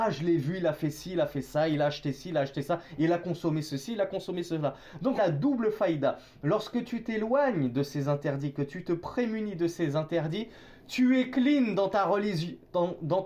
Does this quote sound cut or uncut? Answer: cut